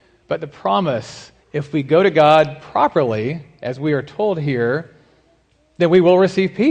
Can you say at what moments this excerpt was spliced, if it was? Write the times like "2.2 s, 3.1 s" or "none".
1.4 s